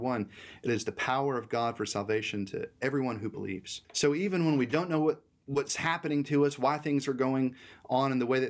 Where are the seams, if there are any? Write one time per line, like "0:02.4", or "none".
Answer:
0:03.8